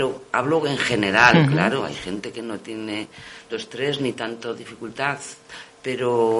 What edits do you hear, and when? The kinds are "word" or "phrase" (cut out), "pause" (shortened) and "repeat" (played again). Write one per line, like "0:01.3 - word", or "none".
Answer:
0:03.5 - word